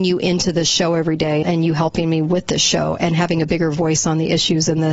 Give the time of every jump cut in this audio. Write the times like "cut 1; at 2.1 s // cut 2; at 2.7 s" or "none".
cut 1; at 1.4 s